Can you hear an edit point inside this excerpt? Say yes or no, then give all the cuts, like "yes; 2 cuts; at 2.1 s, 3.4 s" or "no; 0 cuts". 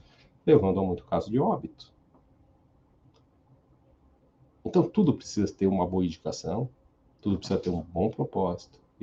no; 0 cuts